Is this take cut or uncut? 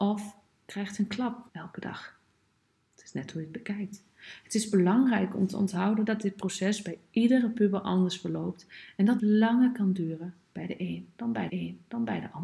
cut